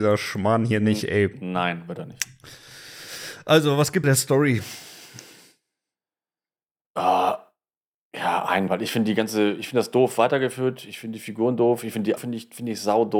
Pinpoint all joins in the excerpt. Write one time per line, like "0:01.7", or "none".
0:04.0
0:08.7
0:12.2